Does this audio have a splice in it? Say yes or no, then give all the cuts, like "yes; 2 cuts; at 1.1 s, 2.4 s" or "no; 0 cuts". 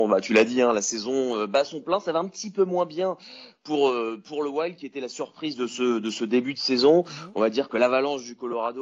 no; 0 cuts